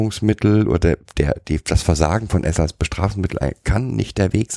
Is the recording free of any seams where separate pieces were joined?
yes; 0 cuts

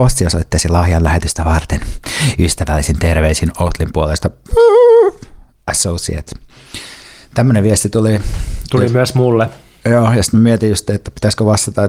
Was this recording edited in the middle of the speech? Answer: no; 0 cuts

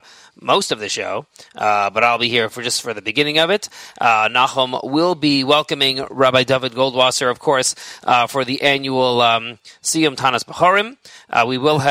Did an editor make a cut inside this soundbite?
no; 0 cuts

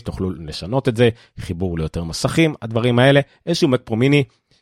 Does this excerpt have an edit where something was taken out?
no; 0 cuts

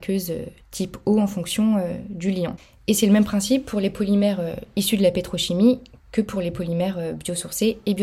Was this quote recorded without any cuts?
yes; 0 cuts

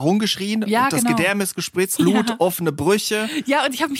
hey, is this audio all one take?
no; 1 cut; at 2.0 s

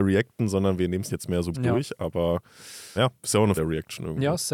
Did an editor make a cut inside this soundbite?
yes; 4 cuts; at 1.1 s, 1.5 s, 3.0 s, 3.6 s

